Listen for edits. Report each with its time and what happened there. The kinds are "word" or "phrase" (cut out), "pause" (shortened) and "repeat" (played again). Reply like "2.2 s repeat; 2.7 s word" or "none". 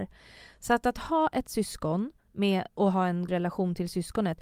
3.3 s word

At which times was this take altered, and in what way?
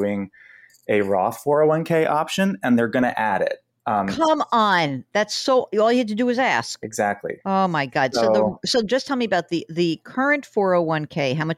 7.4 s pause

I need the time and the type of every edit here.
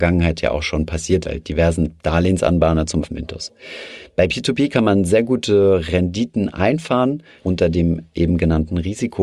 1.2 s word; 3.0 s word; 7.4 s word

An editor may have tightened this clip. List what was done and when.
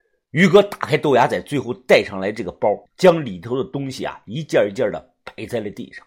2.9 s pause

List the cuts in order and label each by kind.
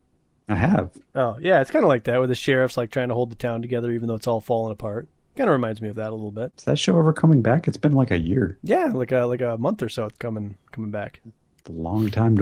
none

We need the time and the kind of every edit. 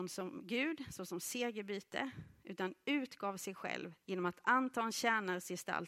4.0 s pause

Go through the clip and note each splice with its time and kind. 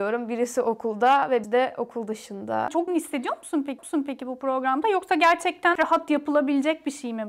1.4 s word; 2.9 s word; 3.8 s repeat; 5.8 s word

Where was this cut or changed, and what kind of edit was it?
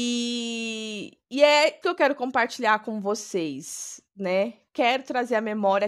1.2 s pause; 1.8 s word

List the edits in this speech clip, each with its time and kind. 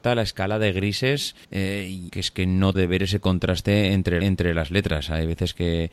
1.4 s pause; 2.1 s phrase; 2.7 s word; 4.2 s repeat

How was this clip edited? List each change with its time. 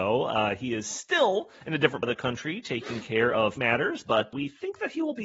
1.5 s pause; 2.0 s word; 3.6 s word; 4.3 s word

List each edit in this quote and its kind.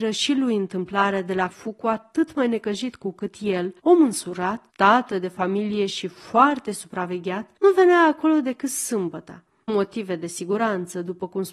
1.5 s word; 3.8 s pause; 4.7 s pause; 7.6 s pause; 9.7 s word

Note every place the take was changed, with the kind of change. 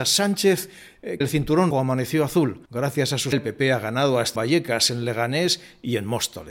1.2 s word; 1.7 s word; 2.7 s pause; 3.3 s word; 4.3 s word

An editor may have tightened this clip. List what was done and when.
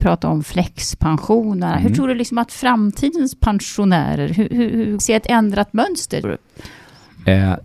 5.0 s phrase; 6.2 s word

